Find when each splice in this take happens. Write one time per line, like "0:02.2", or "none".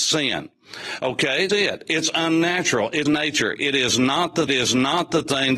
0:01.5
0:03.1
0:04.5